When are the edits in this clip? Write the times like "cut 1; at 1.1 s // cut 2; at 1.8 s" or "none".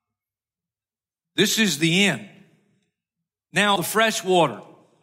cut 1; at 3.8 s

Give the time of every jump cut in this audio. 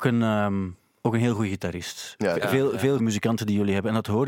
cut 1; at 3.0 s

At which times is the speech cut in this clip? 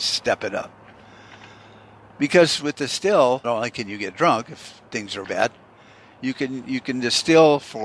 cut 1; at 3.4 s // cut 2; at 5.2 s

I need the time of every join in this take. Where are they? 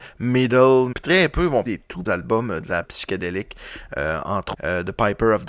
cut 1; at 0.9 s // cut 2; at 1.7 s // cut 3; at 2.1 s // cut 4; at 2.8 s // cut 5; at 4.5 s

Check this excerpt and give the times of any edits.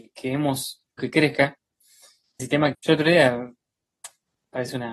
cut 1; at 1.0 s // cut 2; at 2.4 s // cut 3; at 2.7 s

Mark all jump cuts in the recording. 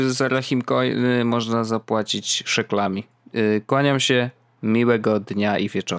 none

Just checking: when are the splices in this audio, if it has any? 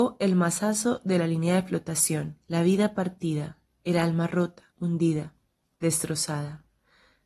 cut 1; at 2.4 s // cut 2; at 4.7 s

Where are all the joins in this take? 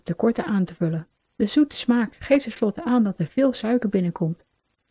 cut 1; at 1.3 s

